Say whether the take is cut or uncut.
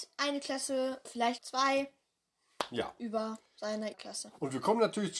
cut